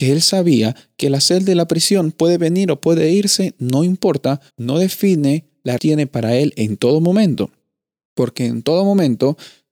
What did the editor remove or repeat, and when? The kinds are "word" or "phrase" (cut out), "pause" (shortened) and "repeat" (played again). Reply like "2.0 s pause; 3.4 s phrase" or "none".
4.5 s pause; 5.8 s phrase